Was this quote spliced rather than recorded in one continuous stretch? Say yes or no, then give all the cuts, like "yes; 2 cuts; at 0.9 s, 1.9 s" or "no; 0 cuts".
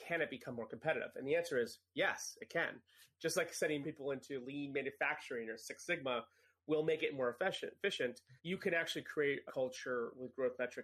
yes; 3 cuts; at 3.8 s, 8.4 s, 9.5 s